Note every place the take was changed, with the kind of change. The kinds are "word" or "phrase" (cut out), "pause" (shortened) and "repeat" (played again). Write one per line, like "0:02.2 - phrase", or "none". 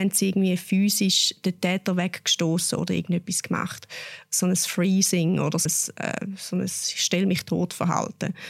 0:05.7 - word